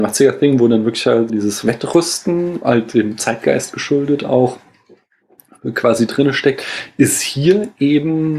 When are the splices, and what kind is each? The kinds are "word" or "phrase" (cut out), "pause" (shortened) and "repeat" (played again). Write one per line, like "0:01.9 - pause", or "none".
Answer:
0:01.3 - word